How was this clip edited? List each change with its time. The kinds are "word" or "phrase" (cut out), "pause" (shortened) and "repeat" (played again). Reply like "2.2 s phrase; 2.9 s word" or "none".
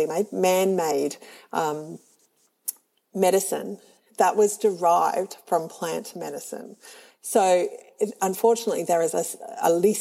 none

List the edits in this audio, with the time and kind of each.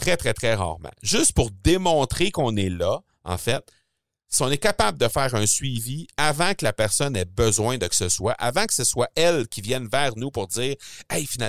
7.9 s word

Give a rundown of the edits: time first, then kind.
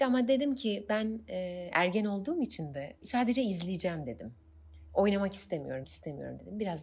3.0 s word; 5.8 s word

